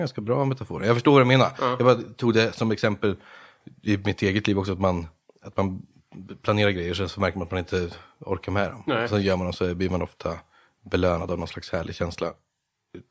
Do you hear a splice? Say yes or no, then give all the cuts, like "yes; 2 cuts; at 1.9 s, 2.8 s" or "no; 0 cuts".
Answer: no; 0 cuts